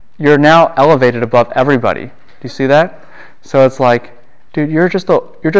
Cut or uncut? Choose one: uncut